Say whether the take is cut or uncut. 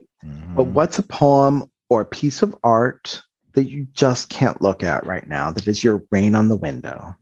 uncut